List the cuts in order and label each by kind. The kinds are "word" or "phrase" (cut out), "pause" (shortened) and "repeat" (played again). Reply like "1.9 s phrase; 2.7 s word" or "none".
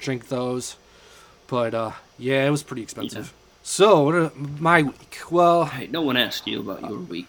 3.5 s pause